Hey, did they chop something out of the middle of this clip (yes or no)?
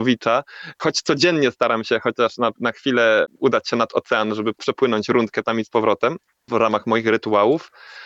no